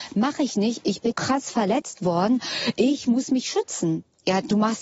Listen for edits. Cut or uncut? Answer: cut